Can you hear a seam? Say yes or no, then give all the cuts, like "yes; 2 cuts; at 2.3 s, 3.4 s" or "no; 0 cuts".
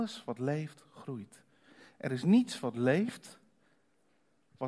no; 0 cuts